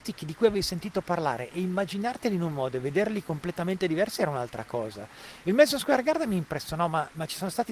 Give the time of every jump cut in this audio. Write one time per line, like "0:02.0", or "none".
none